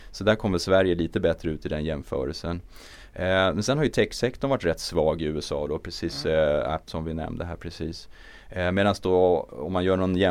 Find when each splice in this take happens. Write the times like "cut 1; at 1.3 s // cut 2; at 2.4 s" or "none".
cut 1; at 3.9 s // cut 2; at 6.9 s